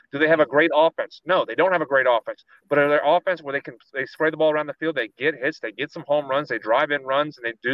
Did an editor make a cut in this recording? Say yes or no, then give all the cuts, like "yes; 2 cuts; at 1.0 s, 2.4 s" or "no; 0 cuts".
no; 0 cuts